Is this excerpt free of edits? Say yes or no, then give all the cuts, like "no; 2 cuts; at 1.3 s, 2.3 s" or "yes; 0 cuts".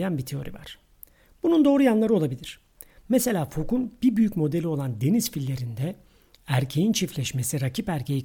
yes; 0 cuts